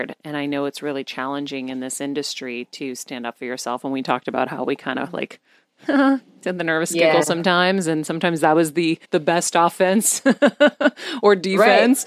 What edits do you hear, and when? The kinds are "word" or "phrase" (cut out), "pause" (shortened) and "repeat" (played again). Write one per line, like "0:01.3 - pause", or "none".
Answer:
0:09.0 - pause

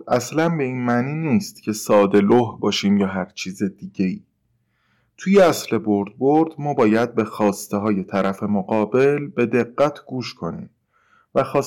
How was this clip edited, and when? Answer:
none

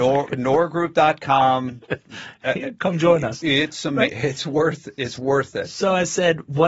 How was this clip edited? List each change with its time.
none

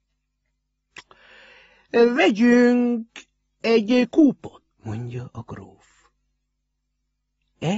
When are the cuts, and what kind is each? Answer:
0:04.7 - pause

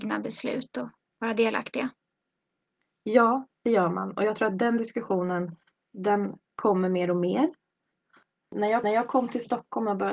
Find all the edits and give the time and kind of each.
0:08.8 - repeat

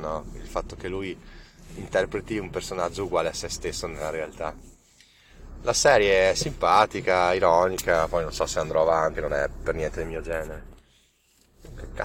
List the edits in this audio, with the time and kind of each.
0:09.1 - word

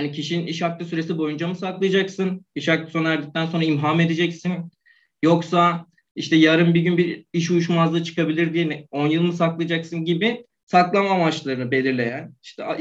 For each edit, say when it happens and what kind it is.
none

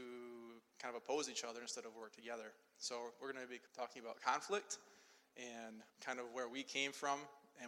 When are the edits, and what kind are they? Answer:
0:03.7 - pause
0:05.9 - pause

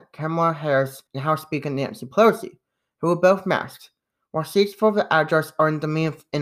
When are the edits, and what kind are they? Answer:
0:01.1 - pause

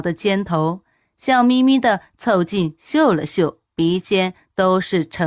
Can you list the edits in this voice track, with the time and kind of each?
0:03.6 - pause

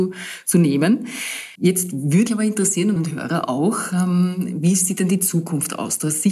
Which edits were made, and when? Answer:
0:01.6 - pause
0:02.3 - word
0:03.0 - phrase

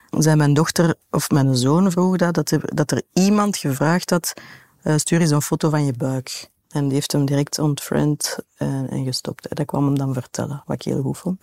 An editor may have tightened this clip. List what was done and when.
none

